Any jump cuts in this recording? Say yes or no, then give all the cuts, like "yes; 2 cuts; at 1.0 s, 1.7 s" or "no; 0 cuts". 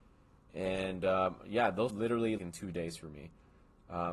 yes; 2 cuts; at 1.9 s, 2.4 s